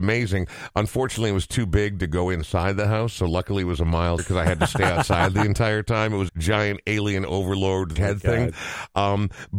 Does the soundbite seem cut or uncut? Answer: cut